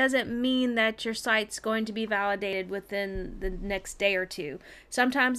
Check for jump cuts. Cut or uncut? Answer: uncut